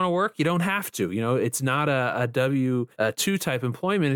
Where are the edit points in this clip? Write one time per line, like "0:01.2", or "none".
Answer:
0:02.9